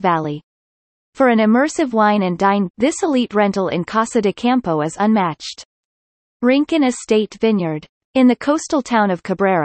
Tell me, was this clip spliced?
yes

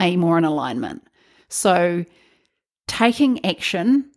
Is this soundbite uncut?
yes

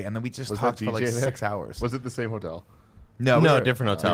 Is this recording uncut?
no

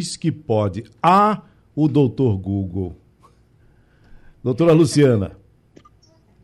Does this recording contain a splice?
no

